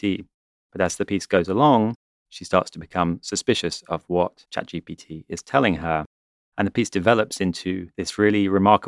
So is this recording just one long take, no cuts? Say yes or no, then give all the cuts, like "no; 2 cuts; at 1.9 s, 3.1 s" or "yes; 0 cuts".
yes; 0 cuts